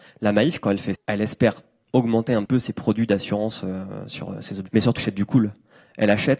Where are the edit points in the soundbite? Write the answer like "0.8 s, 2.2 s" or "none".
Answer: 0.9 s, 1.8 s, 2.5 s, 4.7 s, 5.0 s